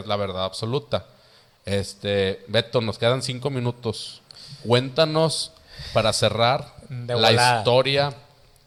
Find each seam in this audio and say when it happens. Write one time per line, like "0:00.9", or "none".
none